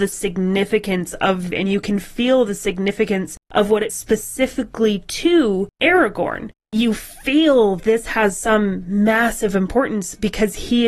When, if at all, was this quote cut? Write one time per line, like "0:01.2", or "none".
0:01.5
0:03.9
0:07.8